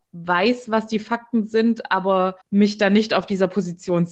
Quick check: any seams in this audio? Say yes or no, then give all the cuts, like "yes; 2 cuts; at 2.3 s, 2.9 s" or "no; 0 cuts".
yes; 1 cut; at 2.4 s